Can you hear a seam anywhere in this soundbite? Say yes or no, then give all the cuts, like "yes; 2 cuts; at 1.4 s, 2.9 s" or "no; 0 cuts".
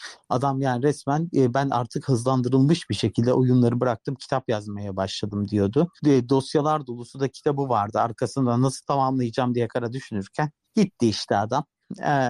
yes; 3 cuts; at 6.0 s, 9.7 s, 10.6 s